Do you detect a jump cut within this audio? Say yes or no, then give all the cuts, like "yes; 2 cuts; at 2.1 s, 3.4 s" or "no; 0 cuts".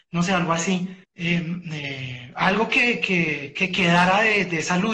yes; 1 cut; at 1.0 s